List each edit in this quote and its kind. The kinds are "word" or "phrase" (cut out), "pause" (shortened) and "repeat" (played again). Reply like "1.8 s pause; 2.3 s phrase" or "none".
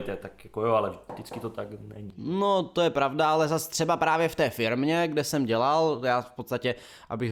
none